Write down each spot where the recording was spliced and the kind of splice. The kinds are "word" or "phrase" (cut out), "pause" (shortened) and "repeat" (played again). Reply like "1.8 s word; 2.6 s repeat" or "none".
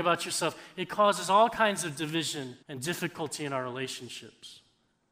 2.6 s pause